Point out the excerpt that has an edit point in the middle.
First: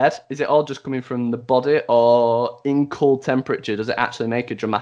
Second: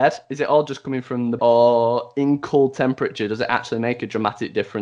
second; 1 cut; at 1.4 s

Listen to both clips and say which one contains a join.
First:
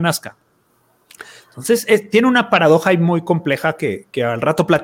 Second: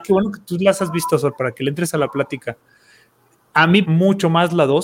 second; 1 cut; at 3.8 s

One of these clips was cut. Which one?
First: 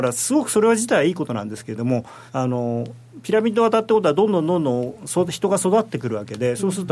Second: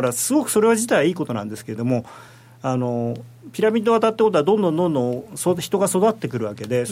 first; 1 cut; at 2.3 s

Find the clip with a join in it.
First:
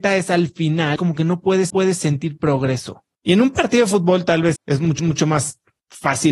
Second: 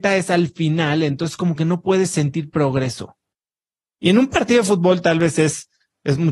first; 5 cuts; at 1.0 s, 1.7 s, 3.1 s, 4.6 s, 5.0 s

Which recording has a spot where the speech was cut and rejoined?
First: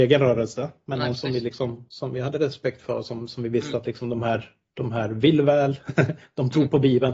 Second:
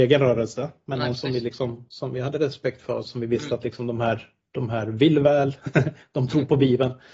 second; 1 cut; at 3.0 s

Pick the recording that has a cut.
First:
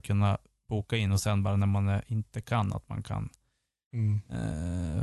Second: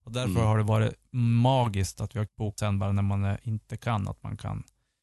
second; 2 cuts; at 2.3 s, 2.6 s

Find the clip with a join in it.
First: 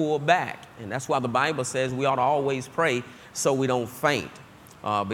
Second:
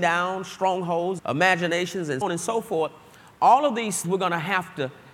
second; 3 cuts; at 1.2 s, 2.2 s, 4.0 s

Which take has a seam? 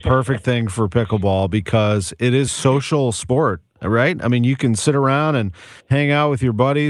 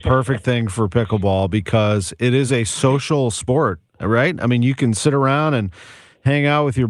first; 2 cuts; at 2.5 s, 5.8 s

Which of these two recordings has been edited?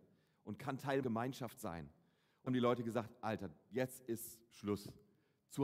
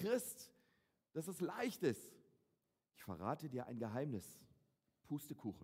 first; 2 cuts; at 1.0 s, 2.5 s

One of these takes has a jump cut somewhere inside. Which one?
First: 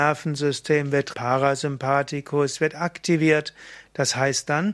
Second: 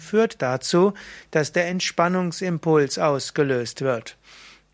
first; 1 cut; at 1.1 s

